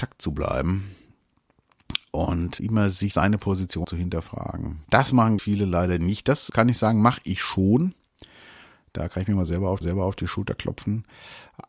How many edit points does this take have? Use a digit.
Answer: 7